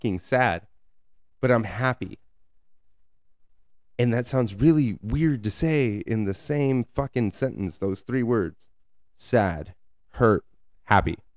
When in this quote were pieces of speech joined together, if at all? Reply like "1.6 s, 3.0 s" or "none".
none